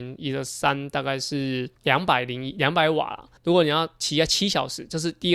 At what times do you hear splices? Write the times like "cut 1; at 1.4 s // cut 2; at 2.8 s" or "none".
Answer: cut 1; at 1.8 s // cut 2; at 3.4 s